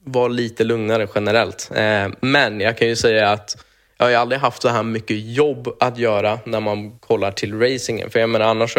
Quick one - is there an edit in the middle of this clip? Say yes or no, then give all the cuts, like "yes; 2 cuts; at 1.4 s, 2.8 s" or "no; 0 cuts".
no; 0 cuts